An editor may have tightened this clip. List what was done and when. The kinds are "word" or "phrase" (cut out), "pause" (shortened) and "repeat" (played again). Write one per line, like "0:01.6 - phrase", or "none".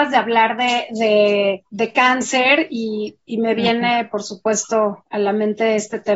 0:01.7 - pause